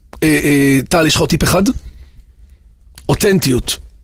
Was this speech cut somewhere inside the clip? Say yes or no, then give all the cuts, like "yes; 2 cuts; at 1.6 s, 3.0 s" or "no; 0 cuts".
no; 0 cuts